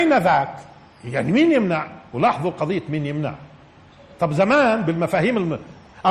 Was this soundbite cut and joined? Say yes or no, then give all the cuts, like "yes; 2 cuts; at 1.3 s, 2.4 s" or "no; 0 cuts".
no; 0 cuts